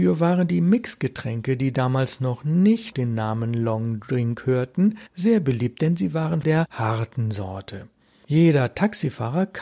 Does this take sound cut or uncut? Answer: cut